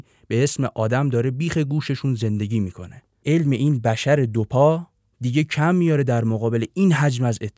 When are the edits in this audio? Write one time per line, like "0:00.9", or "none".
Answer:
0:03.2